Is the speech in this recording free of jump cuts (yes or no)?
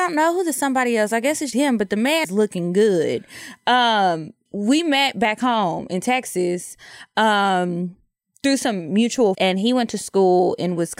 no